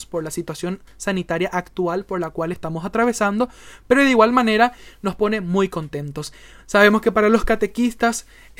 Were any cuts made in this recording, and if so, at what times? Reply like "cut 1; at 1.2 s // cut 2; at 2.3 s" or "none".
none